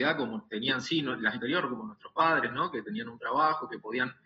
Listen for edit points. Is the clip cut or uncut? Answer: cut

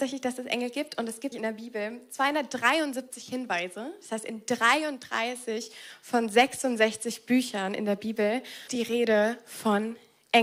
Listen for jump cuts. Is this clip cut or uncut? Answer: cut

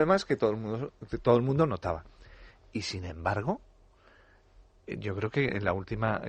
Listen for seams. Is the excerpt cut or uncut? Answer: uncut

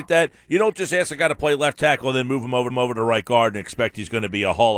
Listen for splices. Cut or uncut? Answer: cut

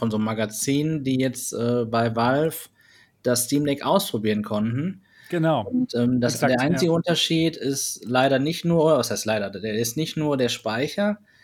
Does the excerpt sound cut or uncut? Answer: uncut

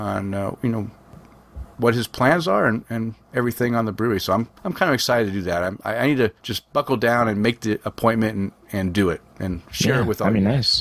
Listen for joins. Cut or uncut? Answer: cut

